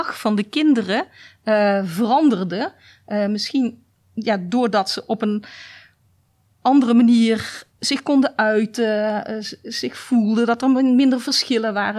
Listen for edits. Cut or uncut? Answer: uncut